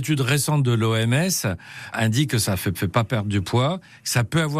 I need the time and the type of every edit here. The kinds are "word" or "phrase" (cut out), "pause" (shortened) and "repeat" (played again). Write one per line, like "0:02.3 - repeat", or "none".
0:02.7 - repeat